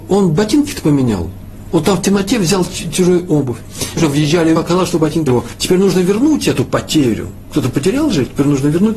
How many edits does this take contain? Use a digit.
3